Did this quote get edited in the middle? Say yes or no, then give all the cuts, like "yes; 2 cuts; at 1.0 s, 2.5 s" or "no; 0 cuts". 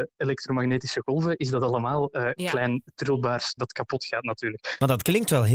yes; 1 cut; at 3.6 s